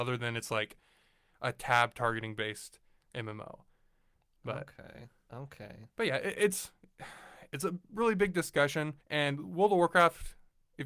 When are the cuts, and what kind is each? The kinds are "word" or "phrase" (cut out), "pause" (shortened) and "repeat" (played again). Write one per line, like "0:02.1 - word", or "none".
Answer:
0:09.0 - pause